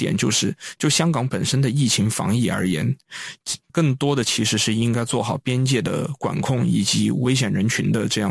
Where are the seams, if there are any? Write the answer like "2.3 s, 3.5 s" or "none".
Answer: 3.7 s